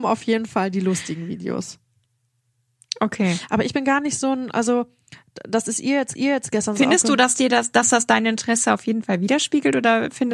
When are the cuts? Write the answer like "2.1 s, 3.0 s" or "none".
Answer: 6.1 s